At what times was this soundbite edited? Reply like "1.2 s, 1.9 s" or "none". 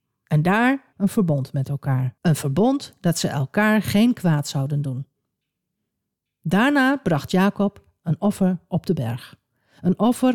0.9 s, 2.2 s